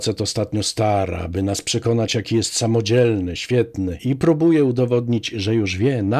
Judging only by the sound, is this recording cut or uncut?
uncut